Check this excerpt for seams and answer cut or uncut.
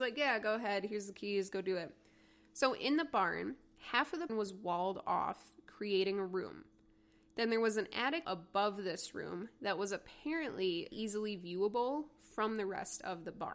cut